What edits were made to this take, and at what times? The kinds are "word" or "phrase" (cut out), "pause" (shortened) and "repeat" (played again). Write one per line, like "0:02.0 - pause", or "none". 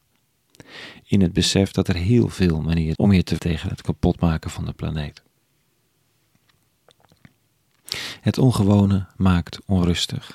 0:03.0 - word
0:03.4 - word